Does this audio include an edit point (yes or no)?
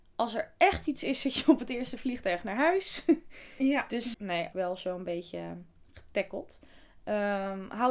yes